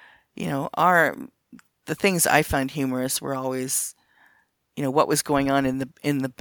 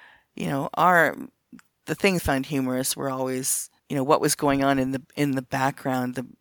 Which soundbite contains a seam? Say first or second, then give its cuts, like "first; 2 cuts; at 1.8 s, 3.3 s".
second; 2 cuts; at 2.2 s, 3.8 s